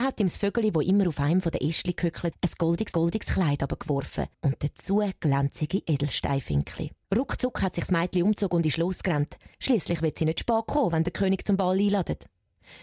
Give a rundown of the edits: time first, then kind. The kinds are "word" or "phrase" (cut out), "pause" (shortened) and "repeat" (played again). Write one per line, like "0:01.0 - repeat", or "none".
0:02.3 - word
0:02.9 - repeat
0:04.3 - pause
0:07.0 - pause
0:09.5 - pause